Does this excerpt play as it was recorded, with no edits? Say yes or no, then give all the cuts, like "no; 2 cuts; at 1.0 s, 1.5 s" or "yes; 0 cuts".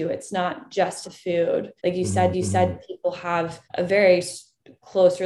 no; 4 cuts; at 1.0 s, 1.8 s, 2.3 s, 3.6 s